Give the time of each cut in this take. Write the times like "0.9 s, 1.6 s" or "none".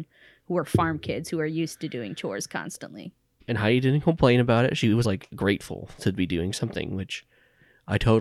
3.4 s, 5.0 s